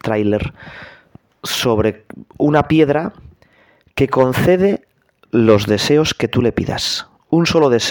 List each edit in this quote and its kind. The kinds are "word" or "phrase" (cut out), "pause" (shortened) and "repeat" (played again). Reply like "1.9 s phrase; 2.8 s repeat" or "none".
none

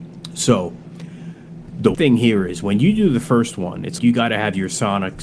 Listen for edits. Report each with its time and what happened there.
1.9 s word; 4.0 s word

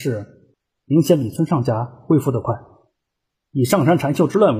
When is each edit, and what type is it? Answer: none

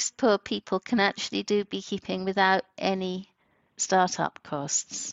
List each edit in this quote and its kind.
none

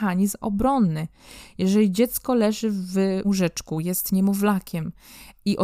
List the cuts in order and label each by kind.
3.2 s word

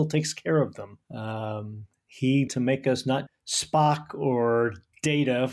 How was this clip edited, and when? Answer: 1.0 s pause; 2.5 s word; 3.3 s word

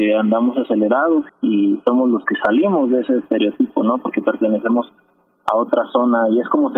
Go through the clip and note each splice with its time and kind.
1.3 s word

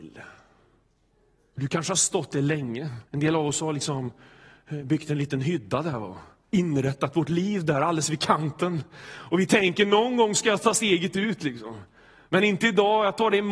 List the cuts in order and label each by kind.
3.1 s pause

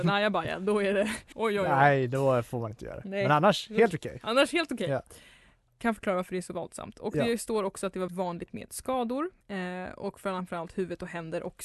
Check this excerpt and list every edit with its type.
1.3 s word; 8.1 s word; 9.4 s pause

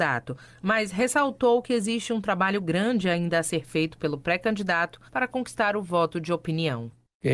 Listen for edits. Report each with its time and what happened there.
5.1 s pause

